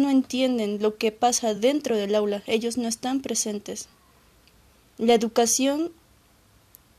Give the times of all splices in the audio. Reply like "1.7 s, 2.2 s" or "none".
none